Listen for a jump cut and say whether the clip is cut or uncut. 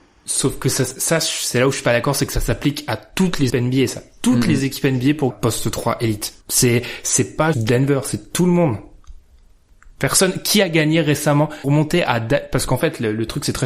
cut